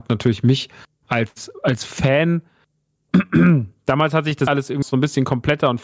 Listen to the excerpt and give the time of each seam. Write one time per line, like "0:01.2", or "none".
0:04.5
0:04.8